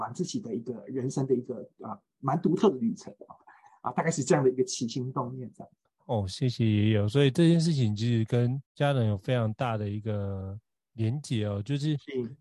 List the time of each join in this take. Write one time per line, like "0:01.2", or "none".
0:05.9
0:08.7